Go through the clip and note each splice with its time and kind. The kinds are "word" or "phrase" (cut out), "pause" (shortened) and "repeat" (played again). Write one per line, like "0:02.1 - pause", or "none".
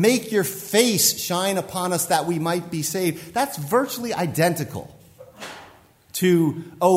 none